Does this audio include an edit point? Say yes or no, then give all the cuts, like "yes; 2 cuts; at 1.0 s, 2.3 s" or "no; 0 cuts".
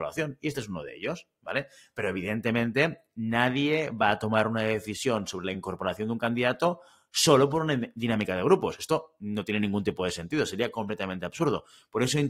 no; 0 cuts